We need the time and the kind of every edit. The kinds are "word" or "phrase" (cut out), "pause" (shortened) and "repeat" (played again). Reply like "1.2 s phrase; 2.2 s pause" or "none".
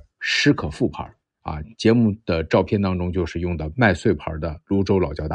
1.2 s pause